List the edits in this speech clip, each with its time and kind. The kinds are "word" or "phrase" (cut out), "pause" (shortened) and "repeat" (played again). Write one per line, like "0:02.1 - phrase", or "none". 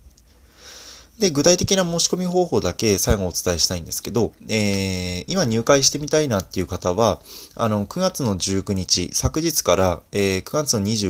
0:01.1 - pause
0:04.4 - pause